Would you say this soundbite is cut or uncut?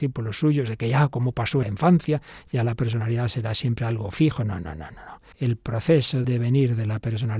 cut